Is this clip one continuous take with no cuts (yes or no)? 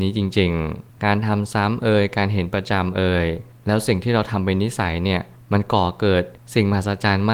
yes